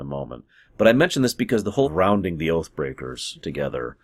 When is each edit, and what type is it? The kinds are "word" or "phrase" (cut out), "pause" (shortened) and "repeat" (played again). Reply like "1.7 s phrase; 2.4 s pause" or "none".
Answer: 1.8 s phrase